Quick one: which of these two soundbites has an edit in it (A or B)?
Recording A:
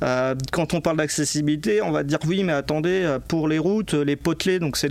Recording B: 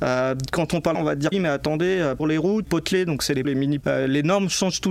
B